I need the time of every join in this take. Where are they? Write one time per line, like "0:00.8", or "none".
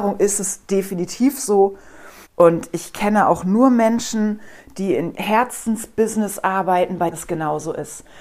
0:02.2
0:05.1
0:07.1

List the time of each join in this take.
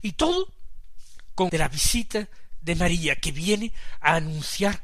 0:01.5

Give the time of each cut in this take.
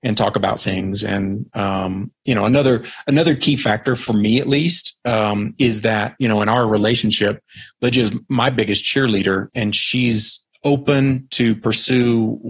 0:09.5

